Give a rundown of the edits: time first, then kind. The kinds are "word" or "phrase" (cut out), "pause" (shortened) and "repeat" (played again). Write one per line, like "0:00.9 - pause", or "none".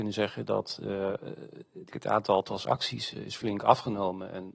0:01.9 - word
0:03.1 - word